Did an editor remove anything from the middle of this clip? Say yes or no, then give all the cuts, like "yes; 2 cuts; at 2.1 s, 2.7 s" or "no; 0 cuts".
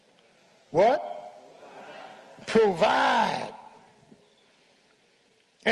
no; 0 cuts